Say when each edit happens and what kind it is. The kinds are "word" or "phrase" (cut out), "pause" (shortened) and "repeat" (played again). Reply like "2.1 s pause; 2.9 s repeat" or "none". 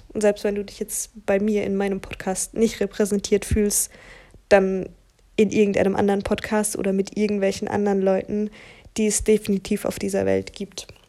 none